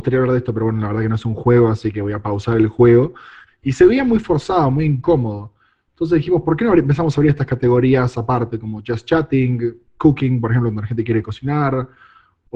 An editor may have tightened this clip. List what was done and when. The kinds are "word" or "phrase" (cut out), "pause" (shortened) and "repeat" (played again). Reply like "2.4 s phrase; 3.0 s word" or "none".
none